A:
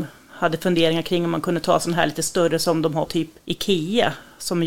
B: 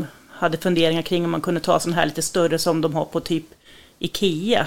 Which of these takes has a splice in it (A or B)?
A